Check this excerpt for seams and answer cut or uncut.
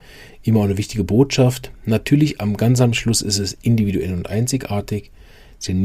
uncut